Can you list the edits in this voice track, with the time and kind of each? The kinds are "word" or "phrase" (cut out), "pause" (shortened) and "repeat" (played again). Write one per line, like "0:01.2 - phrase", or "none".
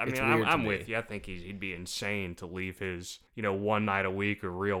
0:03.3 - pause